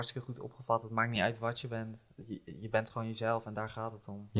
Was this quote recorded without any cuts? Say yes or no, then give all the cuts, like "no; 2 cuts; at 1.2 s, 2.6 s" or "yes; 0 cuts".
yes; 0 cuts